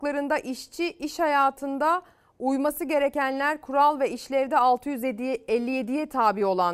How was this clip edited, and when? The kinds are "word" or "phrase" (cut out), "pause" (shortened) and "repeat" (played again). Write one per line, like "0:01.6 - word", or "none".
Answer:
none